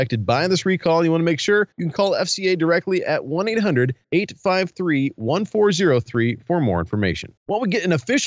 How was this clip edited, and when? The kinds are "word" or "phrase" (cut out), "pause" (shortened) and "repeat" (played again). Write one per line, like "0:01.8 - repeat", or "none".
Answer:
0:01.7 - pause
0:04.0 - pause
0:07.4 - pause